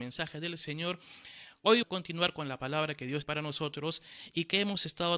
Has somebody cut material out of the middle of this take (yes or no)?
yes